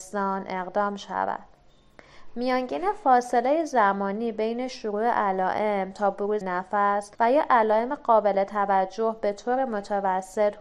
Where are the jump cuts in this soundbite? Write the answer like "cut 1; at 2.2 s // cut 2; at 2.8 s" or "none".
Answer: cut 1; at 6.4 s // cut 2; at 7.1 s